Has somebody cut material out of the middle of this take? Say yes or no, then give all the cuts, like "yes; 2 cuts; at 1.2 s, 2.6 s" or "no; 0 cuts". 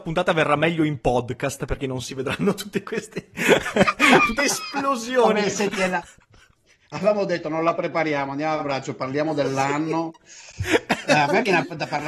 yes; 1 cut; at 4.4 s